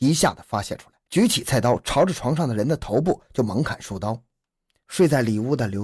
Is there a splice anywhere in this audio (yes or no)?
yes